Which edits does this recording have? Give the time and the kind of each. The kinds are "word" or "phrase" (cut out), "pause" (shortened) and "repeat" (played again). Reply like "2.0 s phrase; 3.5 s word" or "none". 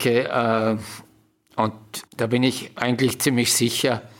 2.1 s pause